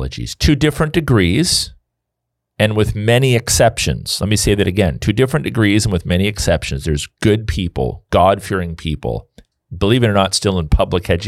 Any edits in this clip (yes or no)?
no